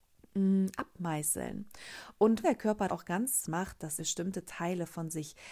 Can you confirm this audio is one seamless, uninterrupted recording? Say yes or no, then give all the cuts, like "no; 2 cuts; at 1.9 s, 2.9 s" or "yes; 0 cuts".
no; 4 cuts; at 2.4 s, 2.9 s, 3.4 s, 4.0 s